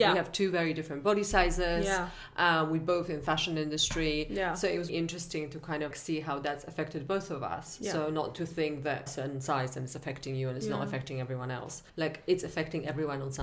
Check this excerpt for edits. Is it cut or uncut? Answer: cut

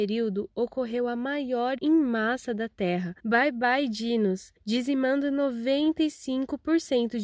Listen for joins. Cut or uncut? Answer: cut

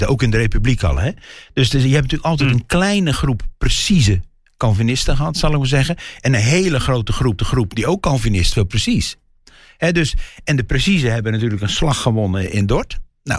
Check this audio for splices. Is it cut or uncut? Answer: cut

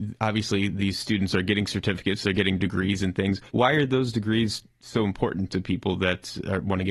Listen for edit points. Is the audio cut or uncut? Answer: cut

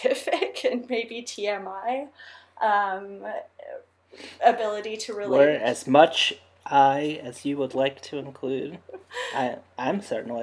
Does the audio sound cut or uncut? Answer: uncut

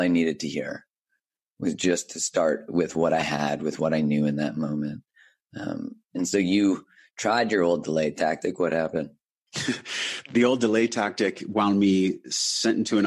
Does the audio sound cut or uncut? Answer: uncut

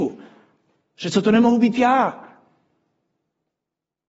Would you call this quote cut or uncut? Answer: uncut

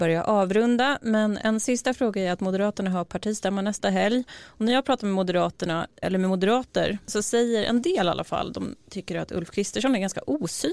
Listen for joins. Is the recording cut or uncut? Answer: cut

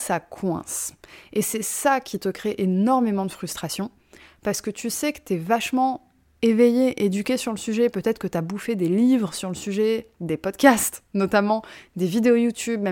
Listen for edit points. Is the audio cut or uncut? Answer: uncut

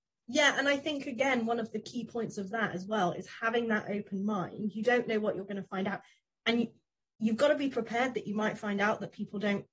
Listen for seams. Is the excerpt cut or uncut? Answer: uncut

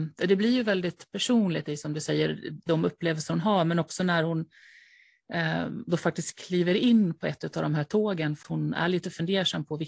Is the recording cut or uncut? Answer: cut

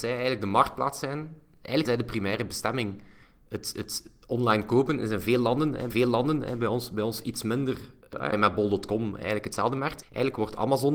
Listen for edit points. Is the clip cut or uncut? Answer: cut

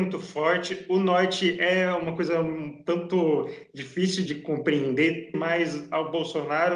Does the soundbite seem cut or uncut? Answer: cut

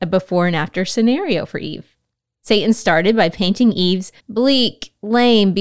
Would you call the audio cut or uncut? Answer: cut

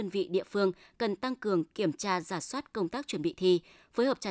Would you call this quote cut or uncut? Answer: uncut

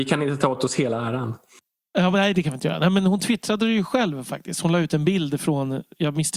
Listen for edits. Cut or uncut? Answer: uncut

